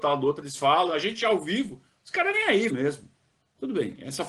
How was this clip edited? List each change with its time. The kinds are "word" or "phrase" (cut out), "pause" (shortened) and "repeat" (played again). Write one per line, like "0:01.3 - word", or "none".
0:02.7 - word